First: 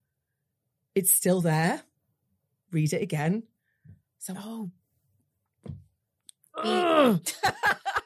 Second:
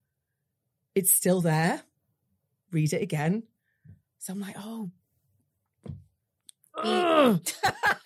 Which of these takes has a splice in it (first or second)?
first